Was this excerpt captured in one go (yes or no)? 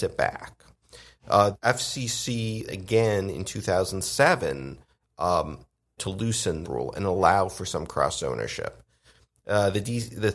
no